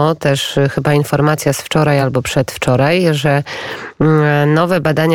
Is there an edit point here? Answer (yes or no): no